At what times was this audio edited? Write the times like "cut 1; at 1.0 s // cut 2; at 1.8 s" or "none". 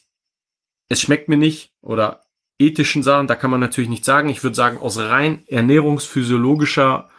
none